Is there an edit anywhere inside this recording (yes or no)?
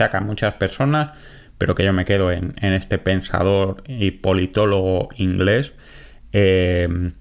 no